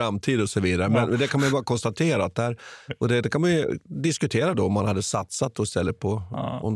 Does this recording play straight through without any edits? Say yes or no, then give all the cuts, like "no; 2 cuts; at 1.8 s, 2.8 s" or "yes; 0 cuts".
yes; 0 cuts